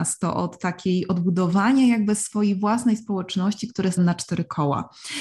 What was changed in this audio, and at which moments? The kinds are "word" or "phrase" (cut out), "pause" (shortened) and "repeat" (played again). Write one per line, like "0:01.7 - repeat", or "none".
0:04.0 - word